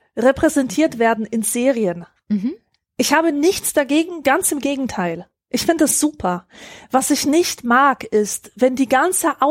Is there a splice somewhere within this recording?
no; 0 cuts

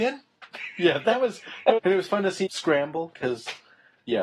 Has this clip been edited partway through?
yes; 3 cuts; at 1.0 s, 1.8 s, 2.5 s

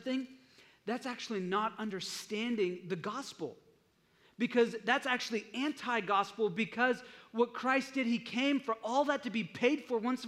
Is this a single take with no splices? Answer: yes; 0 cuts

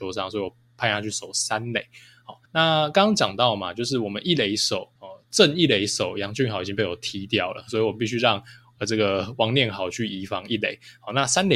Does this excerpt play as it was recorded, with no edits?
no; 2 cuts; at 2.5 s, 5.0 s

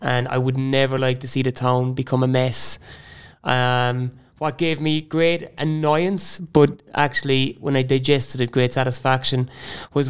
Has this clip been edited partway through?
no; 0 cuts

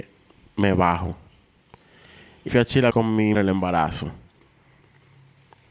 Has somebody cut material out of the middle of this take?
yes; 3 cuts; at 2.5 s, 2.9 s, 3.3 s

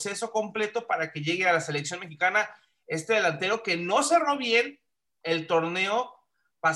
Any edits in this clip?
no; 0 cuts

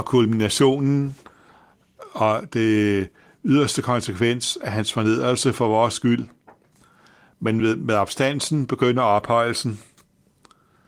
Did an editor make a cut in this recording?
no; 0 cuts

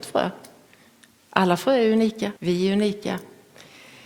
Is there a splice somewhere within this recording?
yes; 1 cut; at 2.4 s

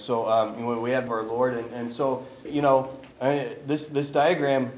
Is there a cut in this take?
yes; 3 cuts; at 1.1 s, 2.4 s, 3.1 s

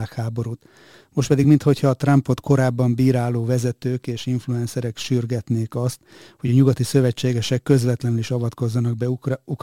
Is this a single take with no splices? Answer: yes; 0 cuts

